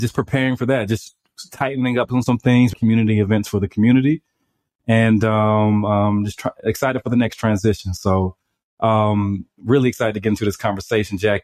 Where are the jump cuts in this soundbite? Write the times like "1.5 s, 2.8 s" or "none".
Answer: 2.7 s